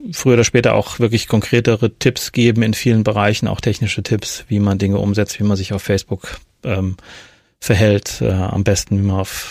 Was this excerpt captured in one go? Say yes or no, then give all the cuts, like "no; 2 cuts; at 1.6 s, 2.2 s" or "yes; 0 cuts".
yes; 0 cuts